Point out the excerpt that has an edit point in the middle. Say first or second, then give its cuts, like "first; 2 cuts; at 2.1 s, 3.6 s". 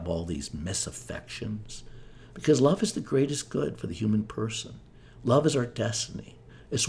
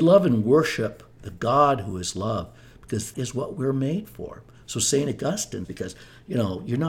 second; 2 cuts; at 3.1 s, 5.6 s